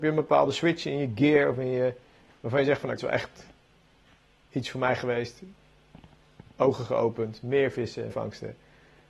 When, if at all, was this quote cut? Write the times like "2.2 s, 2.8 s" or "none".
3.0 s, 8.1 s